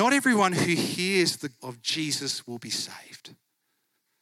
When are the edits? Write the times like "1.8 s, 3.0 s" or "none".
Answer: 1.6 s